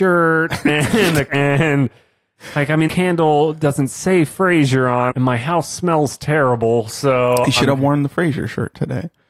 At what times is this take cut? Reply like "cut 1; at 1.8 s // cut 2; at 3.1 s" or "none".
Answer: cut 1; at 1.3 s // cut 2; at 2.9 s // cut 3; at 5.1 s